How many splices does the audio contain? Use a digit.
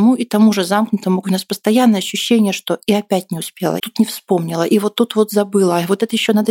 2